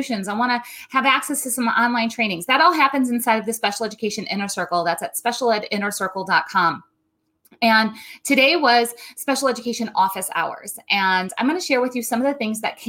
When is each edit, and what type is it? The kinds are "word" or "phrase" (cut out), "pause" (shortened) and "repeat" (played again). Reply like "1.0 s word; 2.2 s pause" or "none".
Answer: none